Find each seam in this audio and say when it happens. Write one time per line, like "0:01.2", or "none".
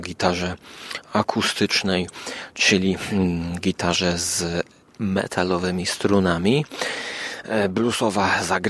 0:04.8